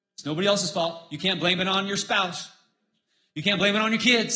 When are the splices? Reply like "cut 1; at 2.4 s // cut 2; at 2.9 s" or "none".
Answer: none